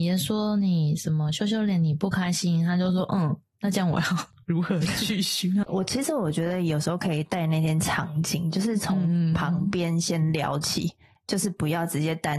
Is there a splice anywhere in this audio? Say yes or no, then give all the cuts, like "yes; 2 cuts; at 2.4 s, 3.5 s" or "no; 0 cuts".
yes; 1 cut; at 5.6 s